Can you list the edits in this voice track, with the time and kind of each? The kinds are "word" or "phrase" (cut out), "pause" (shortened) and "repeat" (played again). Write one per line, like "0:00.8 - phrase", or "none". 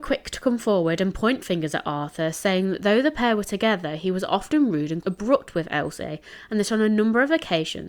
0:05.0 - word